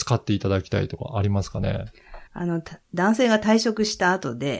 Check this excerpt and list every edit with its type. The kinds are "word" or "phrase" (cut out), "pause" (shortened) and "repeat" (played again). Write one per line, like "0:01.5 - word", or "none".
0:02.3 - pause

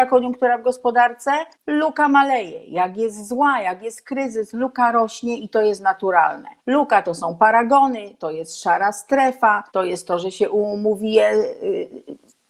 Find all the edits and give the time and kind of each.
0:01.5 - pause
0:06.6 - pause
0:09.7 - pause

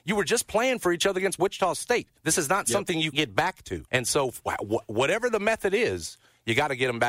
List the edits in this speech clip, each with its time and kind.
0:02.2 - pause
0:03.1 - word
0:03.9 - pause

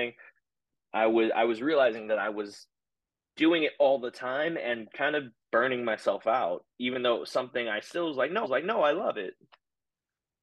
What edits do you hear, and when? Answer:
0:06.7 - pause
0:08.4 - repeat

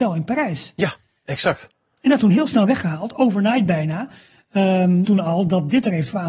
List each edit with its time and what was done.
0:01.7 - pause
0:02.2 - word
0:05.0 - phrase

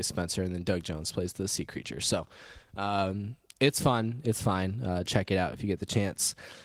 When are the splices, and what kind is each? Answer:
none

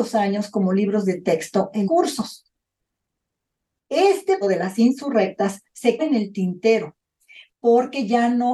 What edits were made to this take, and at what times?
0:01.8 - word
0:04.4 - word
0:06.0 - word

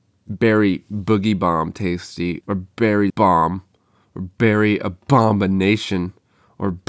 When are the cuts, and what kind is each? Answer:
0:02.4 - word
0:03.1 - word

